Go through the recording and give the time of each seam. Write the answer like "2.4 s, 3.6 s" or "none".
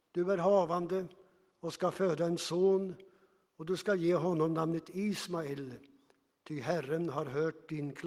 none